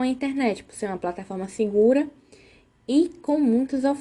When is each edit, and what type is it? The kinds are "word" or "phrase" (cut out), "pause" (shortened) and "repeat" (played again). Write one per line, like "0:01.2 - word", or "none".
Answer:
none

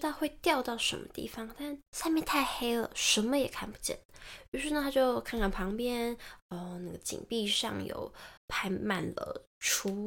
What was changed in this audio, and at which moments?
0:01.9 - pause
0:08.4 - pause

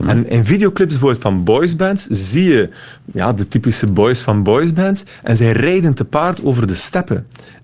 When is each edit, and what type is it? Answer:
none

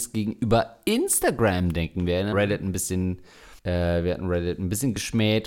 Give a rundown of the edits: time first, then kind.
0:02.3 - phrase
0:03.6 - pause

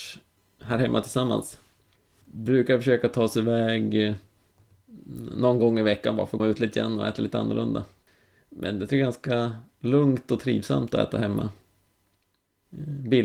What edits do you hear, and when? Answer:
0:06.4 - word

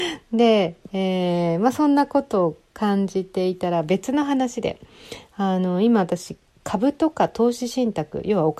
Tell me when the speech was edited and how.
none

